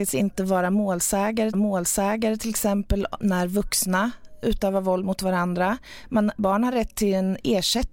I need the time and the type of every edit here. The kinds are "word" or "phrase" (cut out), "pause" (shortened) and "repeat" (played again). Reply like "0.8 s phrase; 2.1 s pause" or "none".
1.5 s repeat; 4.4 s word